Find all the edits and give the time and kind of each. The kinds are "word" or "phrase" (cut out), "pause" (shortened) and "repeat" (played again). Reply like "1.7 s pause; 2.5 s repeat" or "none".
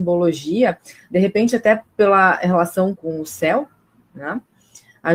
3.0 s word